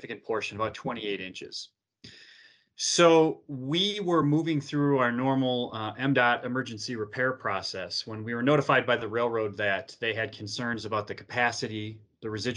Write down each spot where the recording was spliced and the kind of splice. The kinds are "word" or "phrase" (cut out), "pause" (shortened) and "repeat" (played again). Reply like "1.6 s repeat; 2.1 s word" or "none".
none